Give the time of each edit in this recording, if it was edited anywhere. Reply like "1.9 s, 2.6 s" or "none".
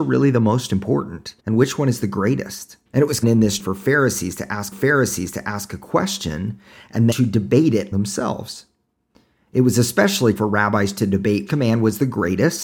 1.4 s, 2.9 s, 3.2 s, 3.6 s, 4.7 s, 7.1 s, 7.9 s, 10.4 s, 11.5 s